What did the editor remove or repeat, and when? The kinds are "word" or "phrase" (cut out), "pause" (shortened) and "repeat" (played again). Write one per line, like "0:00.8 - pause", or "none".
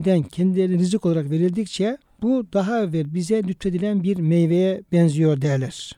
0:02.0 - pause